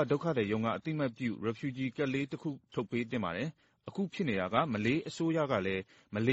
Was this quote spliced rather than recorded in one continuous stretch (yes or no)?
no